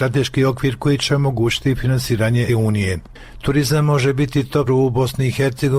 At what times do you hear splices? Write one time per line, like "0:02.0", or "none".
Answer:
0:02.5
0:04.7